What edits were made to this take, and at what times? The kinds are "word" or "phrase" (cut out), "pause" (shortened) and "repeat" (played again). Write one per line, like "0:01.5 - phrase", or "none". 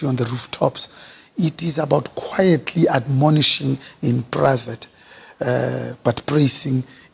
none